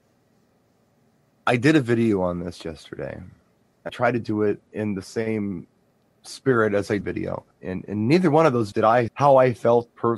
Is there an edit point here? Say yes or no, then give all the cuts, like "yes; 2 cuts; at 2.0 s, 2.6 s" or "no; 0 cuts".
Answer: yes; 7 cuts; at 3.9 s, 4.7 s, 5.9 s, 7.0 s, 7.5 s, 8.7 s, 9.1 s